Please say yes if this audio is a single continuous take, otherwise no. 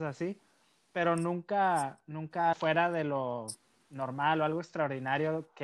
no